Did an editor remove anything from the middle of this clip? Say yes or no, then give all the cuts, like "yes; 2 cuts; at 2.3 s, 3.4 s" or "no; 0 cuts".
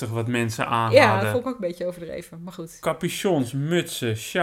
no; 0 cuts